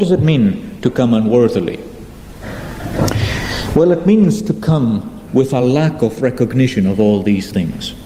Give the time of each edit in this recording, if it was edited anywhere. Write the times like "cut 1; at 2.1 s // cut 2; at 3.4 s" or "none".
none